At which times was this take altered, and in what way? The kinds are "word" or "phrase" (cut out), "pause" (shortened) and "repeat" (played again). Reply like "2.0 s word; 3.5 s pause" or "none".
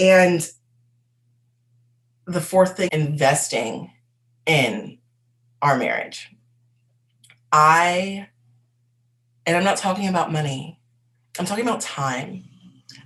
2.9 s word